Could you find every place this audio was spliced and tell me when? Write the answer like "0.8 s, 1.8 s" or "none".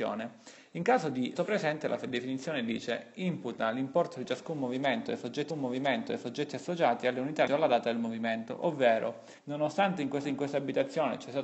1.4 s, 5.5 s, 7.5 s, 9.4 s, 10.2 s